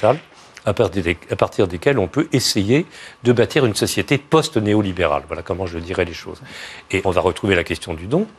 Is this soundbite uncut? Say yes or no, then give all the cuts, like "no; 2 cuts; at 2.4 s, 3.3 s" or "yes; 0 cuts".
no; 1 cut; at 7.0 s